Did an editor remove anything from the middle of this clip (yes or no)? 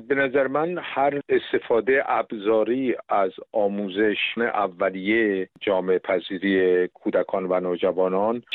yes